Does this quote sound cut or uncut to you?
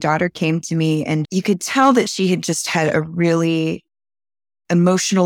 uncut